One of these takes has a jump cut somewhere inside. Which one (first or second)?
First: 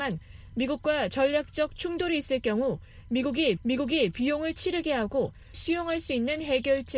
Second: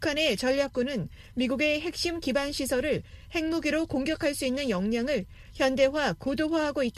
first